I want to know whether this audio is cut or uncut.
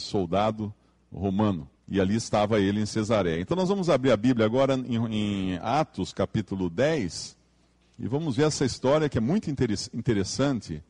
cut